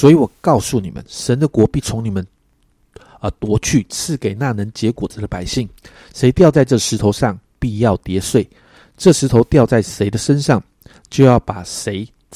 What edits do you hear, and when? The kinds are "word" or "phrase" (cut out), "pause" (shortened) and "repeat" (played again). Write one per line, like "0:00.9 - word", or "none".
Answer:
none